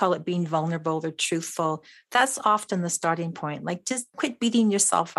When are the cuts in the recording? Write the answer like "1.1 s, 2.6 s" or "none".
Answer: none